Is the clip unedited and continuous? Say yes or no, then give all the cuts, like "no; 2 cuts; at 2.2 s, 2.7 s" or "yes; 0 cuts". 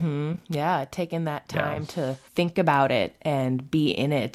no; 1 cut; at 2.3 s